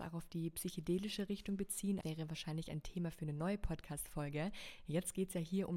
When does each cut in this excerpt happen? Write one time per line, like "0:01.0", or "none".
0:02.0